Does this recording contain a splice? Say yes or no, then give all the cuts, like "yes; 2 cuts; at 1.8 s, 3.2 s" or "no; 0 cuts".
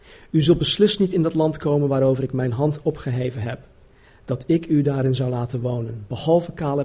yes; 1 cut; at 2.8 s